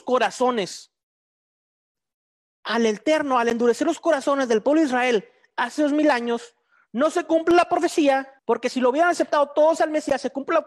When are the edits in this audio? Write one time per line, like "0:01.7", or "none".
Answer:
0:08.4